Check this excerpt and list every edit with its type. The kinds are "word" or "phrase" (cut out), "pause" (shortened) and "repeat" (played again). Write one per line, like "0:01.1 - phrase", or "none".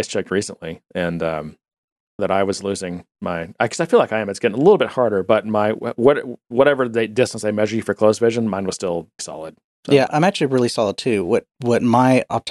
0:02.2 - phrase
0:09.2 - word
0:10.1 - word